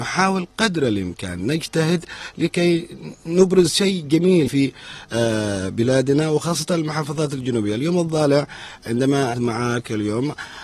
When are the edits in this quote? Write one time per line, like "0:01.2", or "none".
0:04.5
0:09.3